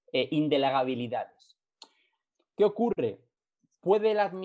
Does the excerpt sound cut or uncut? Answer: uncut